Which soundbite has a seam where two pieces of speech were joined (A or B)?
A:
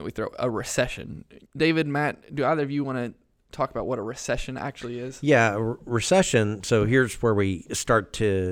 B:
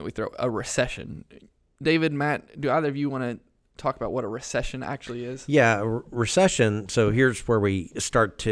A